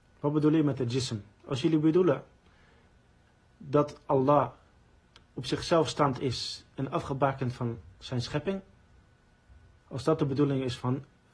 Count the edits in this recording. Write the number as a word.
zero